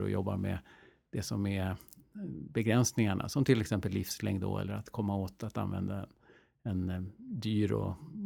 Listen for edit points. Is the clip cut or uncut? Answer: uncut